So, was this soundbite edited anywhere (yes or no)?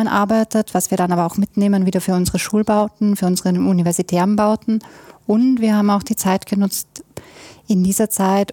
no